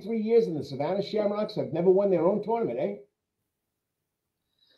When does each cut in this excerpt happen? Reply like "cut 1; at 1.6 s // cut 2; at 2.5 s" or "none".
none